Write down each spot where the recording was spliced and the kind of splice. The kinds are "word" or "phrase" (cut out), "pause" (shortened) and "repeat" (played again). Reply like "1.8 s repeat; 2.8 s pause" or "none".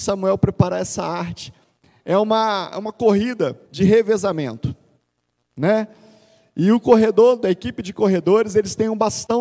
3.7 s pause; 7.4 s phrase